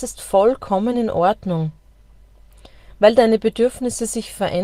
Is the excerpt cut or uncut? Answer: uncut